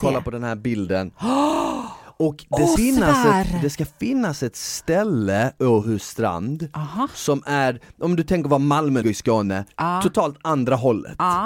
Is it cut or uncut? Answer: cut